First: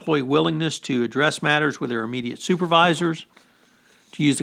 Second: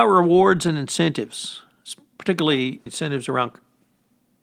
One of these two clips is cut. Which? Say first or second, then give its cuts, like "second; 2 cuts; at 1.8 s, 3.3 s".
second; 1 cut; at 2.9 s